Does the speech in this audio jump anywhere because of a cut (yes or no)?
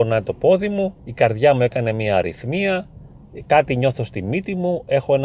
yes